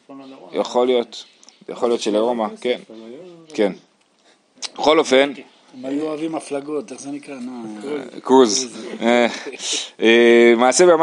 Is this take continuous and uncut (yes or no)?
yes